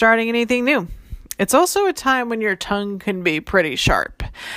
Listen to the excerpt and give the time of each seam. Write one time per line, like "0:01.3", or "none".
none